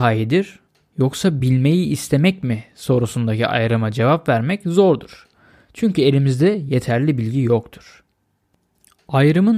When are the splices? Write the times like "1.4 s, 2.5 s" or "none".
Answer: none